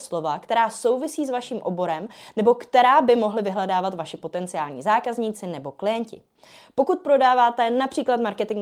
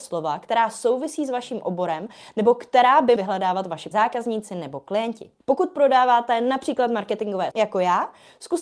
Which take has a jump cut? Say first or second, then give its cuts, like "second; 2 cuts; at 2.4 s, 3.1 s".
second; 4 cuts; at 3.2 s, 3.9 s, 5.4 s, 7.5 s